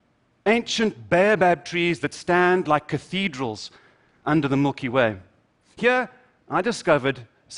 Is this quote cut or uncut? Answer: uncut